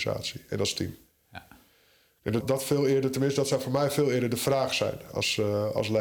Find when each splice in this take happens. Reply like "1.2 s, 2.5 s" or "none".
2.4 s